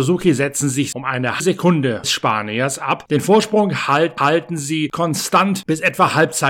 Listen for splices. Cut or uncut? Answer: cut